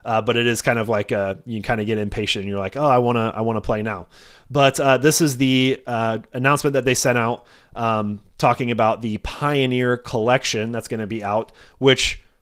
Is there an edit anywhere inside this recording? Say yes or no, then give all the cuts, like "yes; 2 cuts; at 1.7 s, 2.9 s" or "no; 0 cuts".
no; 0 cuts